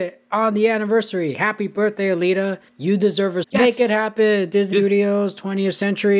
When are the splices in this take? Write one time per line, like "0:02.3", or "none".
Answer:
0:02.7
0:03.4
0:04.7